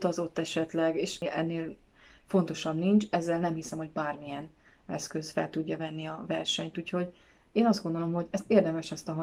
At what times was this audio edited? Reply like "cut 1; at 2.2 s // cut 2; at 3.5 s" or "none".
none